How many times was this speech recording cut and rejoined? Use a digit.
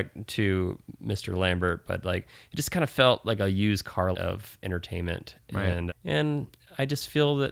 2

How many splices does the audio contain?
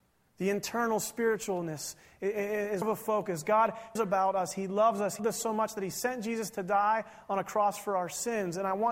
3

